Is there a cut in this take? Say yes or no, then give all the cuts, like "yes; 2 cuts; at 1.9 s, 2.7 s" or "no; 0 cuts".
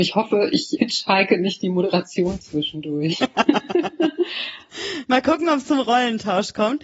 no; 0 cuts